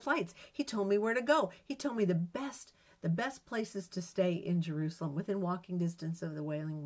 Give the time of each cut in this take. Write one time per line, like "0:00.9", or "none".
none